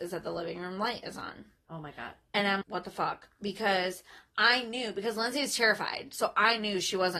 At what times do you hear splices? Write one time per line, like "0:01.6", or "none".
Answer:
0:02.6